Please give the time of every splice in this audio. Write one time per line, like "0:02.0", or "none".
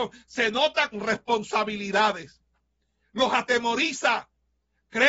0:00.9